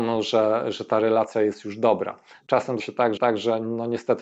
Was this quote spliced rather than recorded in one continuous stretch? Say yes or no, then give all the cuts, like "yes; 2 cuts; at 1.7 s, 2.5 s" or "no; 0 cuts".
yes; 2 cuts; at 2.8 s, 3.2 s